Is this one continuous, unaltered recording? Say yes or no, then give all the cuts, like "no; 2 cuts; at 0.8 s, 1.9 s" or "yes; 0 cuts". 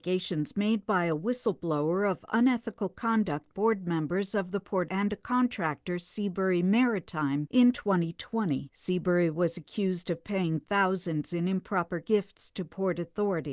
no; 2 cuts; at 3.5 s, 4.9 s